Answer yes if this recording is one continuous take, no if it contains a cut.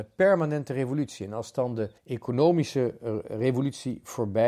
no